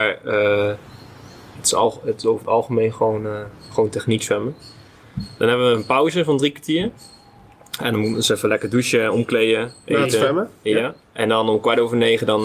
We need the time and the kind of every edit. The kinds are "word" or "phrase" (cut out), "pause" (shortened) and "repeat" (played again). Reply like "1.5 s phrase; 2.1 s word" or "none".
11.0 s pause

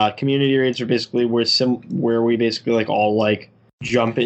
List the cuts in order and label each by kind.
none

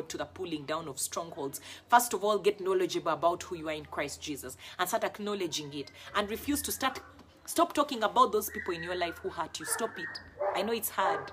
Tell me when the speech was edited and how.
none

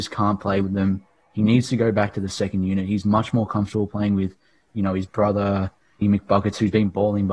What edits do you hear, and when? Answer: 6.0 s word

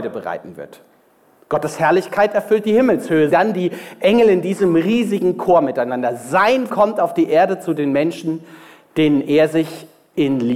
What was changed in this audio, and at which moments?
3.3 s word; 6.7 s word

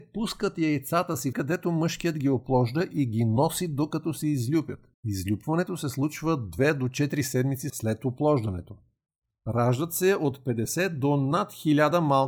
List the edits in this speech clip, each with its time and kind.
1.3 s phrase; 4.9 s pause

